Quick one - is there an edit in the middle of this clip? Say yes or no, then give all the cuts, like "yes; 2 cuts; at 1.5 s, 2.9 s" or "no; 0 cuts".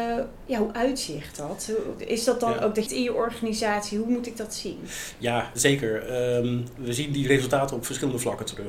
yes; 2 cuts; at 2.9 s, 5.6 s